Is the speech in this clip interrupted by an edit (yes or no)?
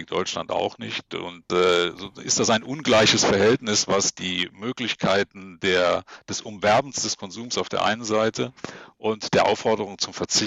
yes